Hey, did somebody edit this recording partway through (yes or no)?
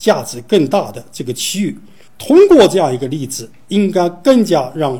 no